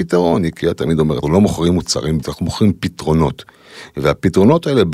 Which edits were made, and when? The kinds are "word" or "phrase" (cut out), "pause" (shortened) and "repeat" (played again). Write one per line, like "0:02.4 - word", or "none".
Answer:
0:01.2 - word
0:02.2 - word